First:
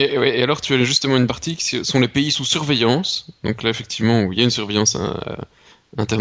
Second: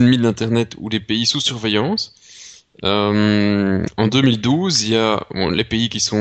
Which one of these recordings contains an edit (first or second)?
first